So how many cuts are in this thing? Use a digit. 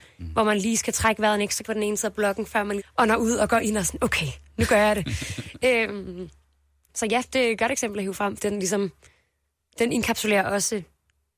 4